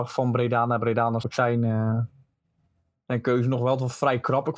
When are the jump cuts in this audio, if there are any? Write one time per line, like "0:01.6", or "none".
0:01.2